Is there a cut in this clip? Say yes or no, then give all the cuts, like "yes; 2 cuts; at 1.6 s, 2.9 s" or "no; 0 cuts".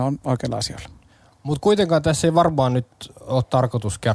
no; 0 cuts